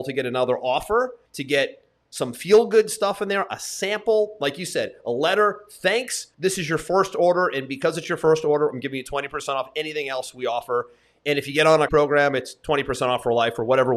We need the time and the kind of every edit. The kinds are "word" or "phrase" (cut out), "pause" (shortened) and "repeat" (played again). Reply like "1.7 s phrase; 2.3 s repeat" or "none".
1.2 s pause; 6.3 s pause; 11.9 s word